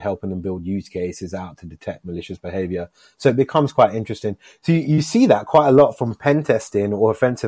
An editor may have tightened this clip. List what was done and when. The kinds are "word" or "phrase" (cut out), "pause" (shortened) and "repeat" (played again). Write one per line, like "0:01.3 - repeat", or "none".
none